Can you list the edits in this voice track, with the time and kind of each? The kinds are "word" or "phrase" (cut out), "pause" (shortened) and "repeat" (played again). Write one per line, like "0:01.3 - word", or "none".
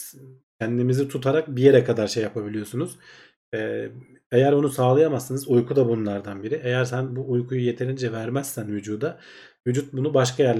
none